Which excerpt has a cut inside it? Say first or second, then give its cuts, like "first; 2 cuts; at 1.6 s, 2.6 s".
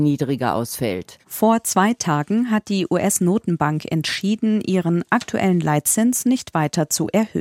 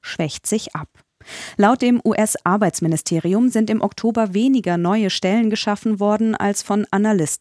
first; 1 cut; at 1.2 s